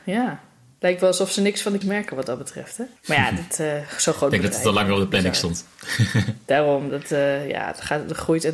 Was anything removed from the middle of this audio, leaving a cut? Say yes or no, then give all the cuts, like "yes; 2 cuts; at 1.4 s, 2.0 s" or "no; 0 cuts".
yes; 2 cuts; at 1.8 s, 3.0 s